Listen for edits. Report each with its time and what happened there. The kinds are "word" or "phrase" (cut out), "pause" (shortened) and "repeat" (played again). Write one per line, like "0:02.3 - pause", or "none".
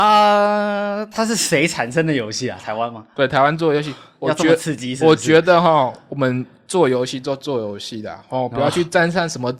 none